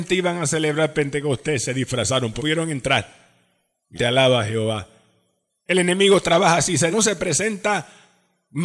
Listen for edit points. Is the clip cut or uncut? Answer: cut